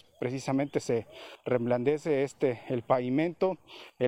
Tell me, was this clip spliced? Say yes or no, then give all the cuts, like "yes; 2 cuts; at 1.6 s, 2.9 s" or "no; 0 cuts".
no; 0 cuts